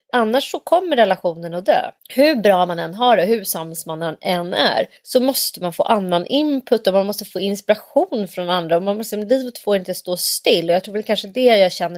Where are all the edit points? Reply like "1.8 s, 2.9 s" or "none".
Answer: 2.0 s, 5.0 s